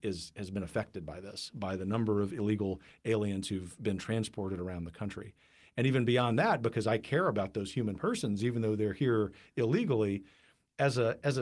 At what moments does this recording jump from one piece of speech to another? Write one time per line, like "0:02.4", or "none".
none